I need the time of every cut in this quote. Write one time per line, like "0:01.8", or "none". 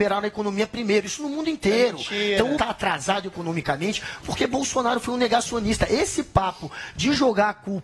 0:02.6
0:04.2